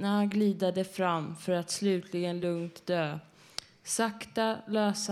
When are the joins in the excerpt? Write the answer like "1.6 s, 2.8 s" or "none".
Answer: none